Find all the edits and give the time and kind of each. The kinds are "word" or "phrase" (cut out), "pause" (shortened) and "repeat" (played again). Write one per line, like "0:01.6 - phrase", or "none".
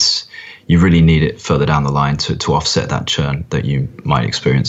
none